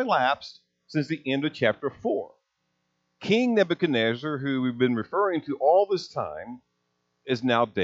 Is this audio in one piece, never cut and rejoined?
yes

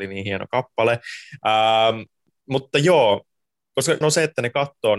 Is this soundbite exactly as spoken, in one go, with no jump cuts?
no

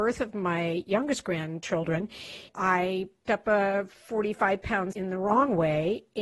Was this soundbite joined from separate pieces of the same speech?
yes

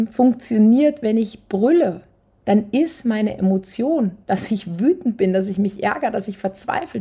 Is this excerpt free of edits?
no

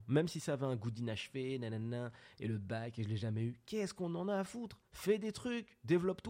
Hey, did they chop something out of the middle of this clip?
yes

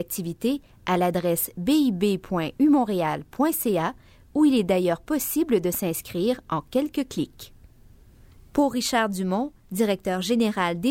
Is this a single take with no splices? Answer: yes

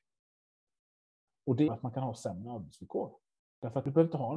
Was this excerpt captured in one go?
no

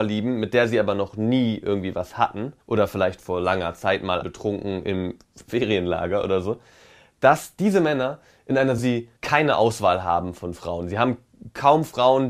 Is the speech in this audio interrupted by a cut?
yes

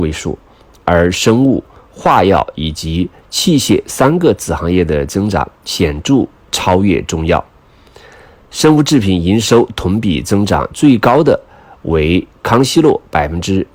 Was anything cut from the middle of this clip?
no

